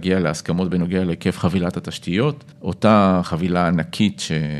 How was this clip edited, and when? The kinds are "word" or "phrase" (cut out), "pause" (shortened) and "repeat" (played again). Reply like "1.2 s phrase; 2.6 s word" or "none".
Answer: 2.5 s pause